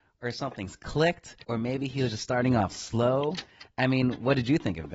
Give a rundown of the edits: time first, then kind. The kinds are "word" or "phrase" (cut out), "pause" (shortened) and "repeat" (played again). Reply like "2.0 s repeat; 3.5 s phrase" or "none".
1.4 s pause